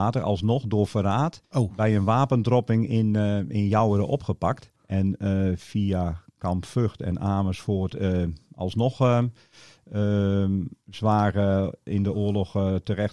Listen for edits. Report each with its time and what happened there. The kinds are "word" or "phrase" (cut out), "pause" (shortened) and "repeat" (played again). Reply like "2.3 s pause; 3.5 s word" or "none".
1.4 s pause; 4.8 s pause